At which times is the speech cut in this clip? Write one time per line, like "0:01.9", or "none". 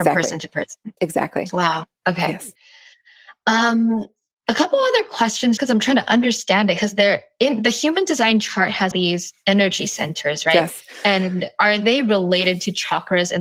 0:01.0
0:02.0
0:05.6
0:08.9